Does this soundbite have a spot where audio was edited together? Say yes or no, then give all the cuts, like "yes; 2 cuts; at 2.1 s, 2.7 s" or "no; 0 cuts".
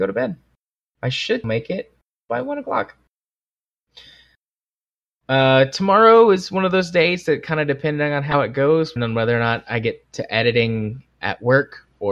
yes; 2 cuts; at 1.4 s, 9.0 s